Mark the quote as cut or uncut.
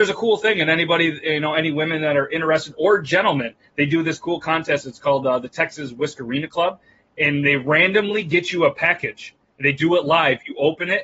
uncut